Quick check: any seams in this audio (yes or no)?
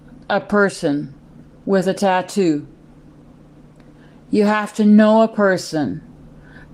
no